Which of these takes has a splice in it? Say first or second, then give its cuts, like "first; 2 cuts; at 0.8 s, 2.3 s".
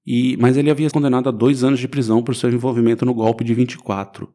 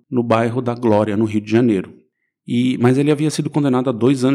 first; 1 cut; at 0.9 s